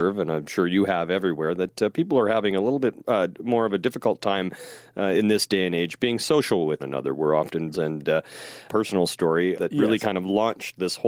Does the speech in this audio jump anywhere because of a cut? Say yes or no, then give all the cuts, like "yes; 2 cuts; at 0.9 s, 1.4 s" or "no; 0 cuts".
yes; 4 cuts; at 6.8 s, 7.7 s, 8.7 s, 9.5 s